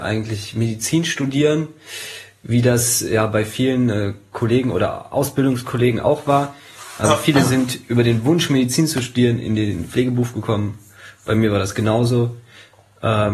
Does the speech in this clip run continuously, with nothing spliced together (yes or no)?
yes